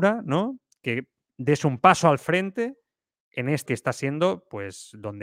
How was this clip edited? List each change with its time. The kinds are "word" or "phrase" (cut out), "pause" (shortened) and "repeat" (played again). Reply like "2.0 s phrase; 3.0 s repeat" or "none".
3.7 s word